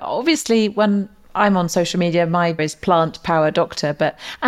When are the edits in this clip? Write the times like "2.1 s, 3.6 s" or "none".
2.6 s